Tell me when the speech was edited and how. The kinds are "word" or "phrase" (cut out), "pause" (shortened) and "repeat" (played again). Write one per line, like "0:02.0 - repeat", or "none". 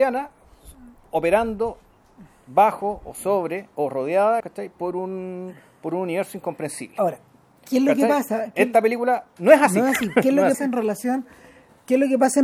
0:04.4 - word
0:10.5 - word